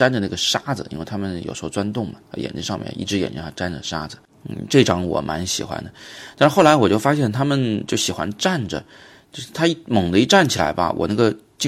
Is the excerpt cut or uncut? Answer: uncut